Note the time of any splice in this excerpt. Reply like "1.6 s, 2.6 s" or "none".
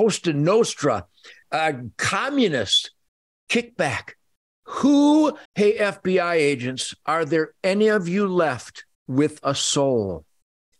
3.2 s, 5.5 s, 8.9 s